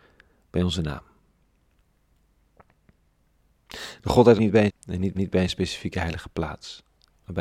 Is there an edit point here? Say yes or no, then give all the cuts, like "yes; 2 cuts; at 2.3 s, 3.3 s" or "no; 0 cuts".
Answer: yes; 3 cuts; at 4.4 s, 4.7 s, 5.1 s